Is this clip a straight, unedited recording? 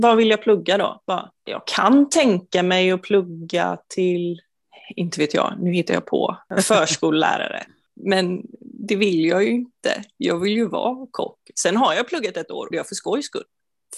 no; 2 cuts; at 1.4 s, 12.7 s

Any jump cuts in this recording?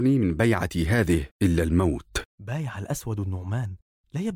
yes; 2 cuts; at 1.3 s, 2.3 s

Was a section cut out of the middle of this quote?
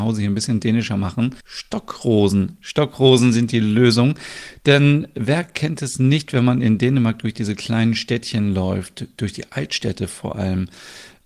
yes; 1 cut; at 1.4 s

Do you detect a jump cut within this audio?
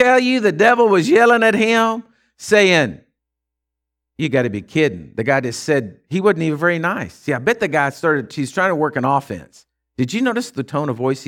no; 0 cuts

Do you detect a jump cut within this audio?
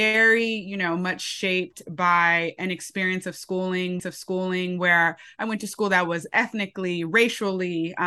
yes; 1 cut; at 4.0 s

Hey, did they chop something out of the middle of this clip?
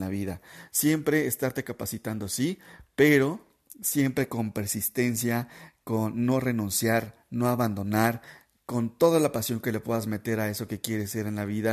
no; 0 cuts

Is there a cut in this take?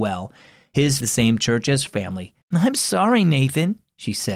yes; 3 cuts; at 1.0 s, 1.9 s, 2.4 s

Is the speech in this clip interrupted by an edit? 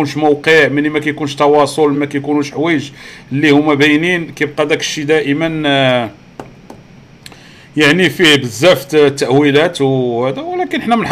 yes; 1 cut; at 1.9 s

